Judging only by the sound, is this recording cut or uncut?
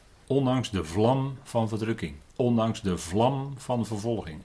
uncut